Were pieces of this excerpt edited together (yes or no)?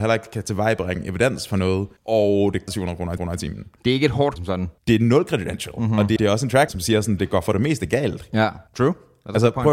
yes